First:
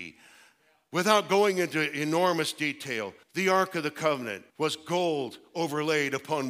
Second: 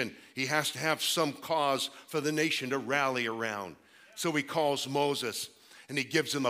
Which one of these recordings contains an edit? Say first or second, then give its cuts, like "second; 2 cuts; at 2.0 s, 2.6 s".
first; 2 cuts; at 3.2 s, 4.5 s